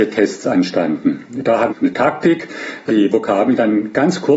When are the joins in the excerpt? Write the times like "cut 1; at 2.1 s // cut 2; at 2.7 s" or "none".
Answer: cut 1; at 1.7 s // cut 2; at 2.9 s